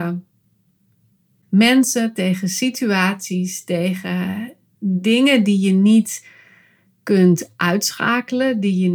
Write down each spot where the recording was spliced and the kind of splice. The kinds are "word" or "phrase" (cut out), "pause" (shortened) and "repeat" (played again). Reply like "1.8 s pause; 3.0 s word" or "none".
none